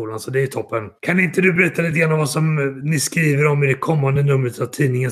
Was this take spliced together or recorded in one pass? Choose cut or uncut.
uncut